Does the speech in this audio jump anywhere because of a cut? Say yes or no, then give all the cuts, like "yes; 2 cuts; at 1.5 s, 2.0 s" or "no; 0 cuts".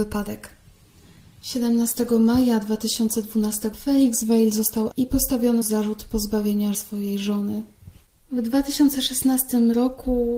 yes; 4 cuts; at 3.7 s, 4.9 s, 5.6 s, 6.7 s